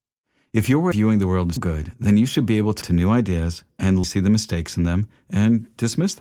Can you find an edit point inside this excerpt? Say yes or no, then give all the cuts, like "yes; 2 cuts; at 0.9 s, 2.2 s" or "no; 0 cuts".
yes; 4 cuts; at 0.9 s, 1.6 s, 2.8 s, 4.0 s